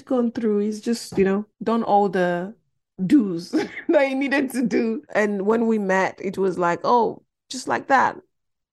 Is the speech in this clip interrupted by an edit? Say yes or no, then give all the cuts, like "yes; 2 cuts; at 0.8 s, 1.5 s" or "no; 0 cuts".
yes; 1 cut; at 1.5 s